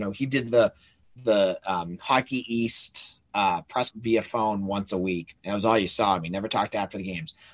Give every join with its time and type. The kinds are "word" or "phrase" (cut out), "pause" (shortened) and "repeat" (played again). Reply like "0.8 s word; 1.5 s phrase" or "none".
3.9 s word; 5.4 s pause